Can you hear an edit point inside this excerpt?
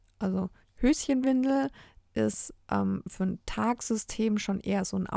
no; 0 cuts

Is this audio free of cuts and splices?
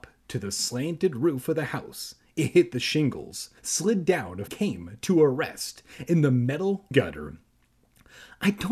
no; 3 cuts; at 3.6 s, 4.5 s, 6.9 s

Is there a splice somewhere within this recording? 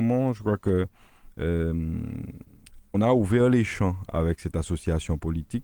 yes; 1 cut; at 2.9 s

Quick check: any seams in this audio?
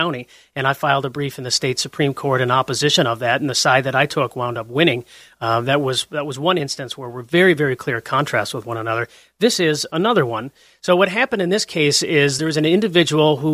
no; 0 cuts

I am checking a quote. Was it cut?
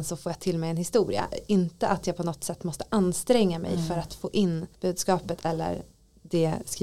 yes; 1 cut; at 4.7 s

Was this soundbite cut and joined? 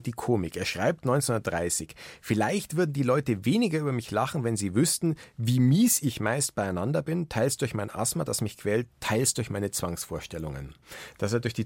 no; 0 cuts

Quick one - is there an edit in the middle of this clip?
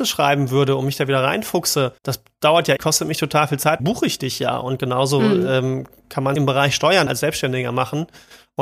yes; 5 cuts; at 2.0 s, 2.8 s, 3.8 s, 6.4 s, 7.1 s

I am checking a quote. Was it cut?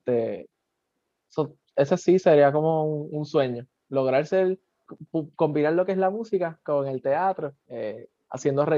yes; 1 cut; at 7.6 s

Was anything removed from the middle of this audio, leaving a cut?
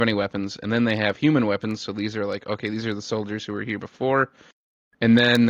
no; 0 cuts

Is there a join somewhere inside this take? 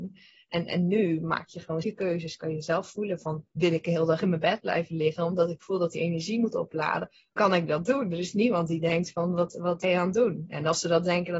yes; 4 cuts; at 1.8 s, 3.5 s, 7.4 s, 9.8 s

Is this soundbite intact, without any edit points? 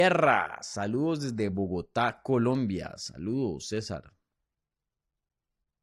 yes; 0 cuts

